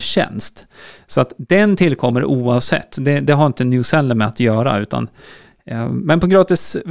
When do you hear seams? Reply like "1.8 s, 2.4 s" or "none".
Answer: none